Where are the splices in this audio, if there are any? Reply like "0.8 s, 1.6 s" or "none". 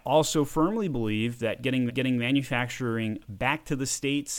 1.9 s